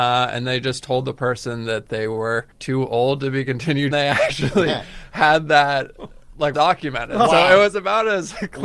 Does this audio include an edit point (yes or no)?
yes